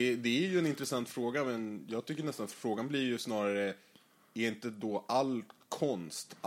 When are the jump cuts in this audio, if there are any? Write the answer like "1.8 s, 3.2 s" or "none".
none